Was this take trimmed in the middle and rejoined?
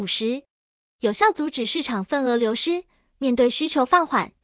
no; 0 cuts

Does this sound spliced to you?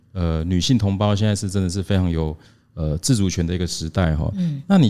no; 0 cuts

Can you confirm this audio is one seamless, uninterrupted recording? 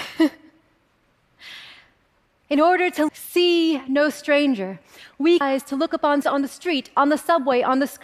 no; 3 cuts; at 3.1 s, 5.4 s, 6.2 s

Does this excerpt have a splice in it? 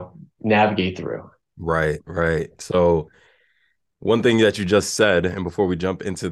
no; 0 cuts

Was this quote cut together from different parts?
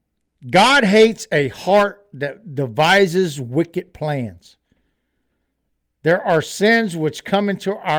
no; 0 cuts

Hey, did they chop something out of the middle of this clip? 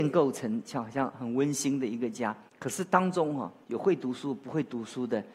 yes; 1 cut; at 2.5 s

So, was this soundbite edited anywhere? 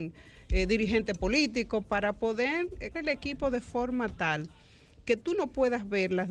yes; 1 cut; at 2.9 s

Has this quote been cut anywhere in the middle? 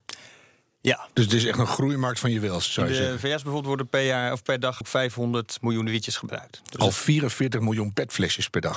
yes; 2 cuts; at 1.1 s, 4.8 s

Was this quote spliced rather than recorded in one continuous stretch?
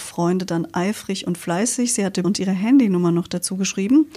yes; 1 cut; at 2.2 s

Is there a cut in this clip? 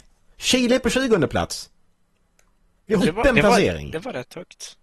yes; 1 cut; at 3.0 s

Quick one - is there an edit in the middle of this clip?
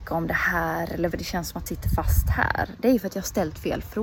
yes; 2 cuts; at 1.1 s, 1.7 s

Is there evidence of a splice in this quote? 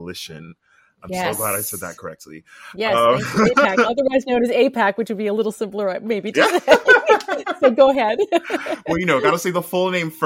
no; 0 cuts

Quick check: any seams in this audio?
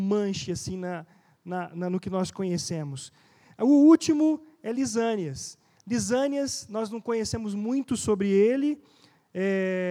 no; 0 cuts

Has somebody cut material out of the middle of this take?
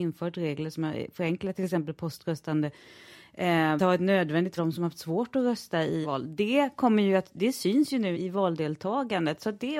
yes; 4 cuts; at 3.8 s, 4.6 s, 6.0 s, 8.1 s

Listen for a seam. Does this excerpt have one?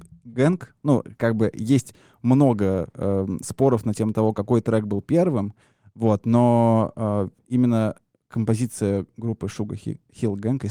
no; 0 cuts

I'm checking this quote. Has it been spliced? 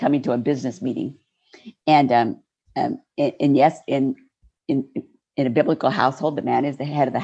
no; 0 cuts

